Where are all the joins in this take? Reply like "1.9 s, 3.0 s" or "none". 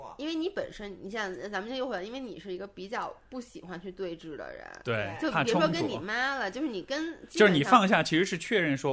none